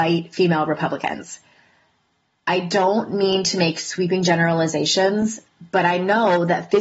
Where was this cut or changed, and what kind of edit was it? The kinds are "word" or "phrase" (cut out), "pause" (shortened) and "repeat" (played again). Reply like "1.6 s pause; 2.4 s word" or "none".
none

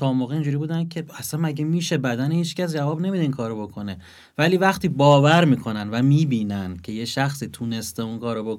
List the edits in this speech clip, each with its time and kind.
none

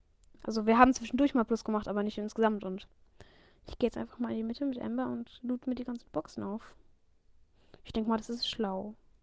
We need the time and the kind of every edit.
none

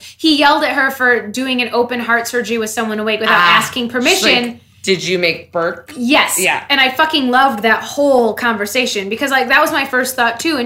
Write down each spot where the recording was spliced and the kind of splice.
9.3 s phrase

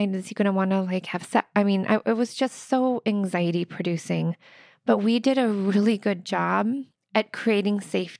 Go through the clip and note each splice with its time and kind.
none

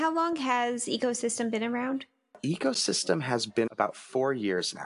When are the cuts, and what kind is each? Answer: 3.7 s word

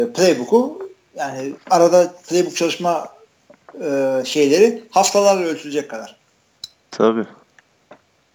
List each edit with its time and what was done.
none

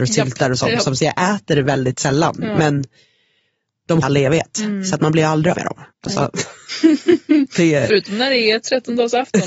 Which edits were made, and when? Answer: 1.0 s phrase; 4.0 s phrase; 5.5 s word; 5.9 s pause

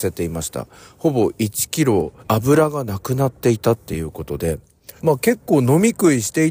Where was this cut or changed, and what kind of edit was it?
2.2 s pause; 5.0 s pause

